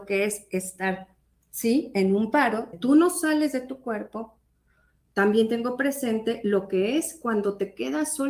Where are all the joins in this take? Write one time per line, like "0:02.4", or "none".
0:02.7